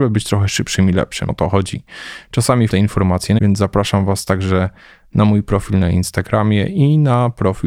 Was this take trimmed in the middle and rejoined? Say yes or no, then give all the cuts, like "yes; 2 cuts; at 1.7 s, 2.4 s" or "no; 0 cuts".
yes; 3 cuts; at 1.3 s, 2.7 s, 3.4 s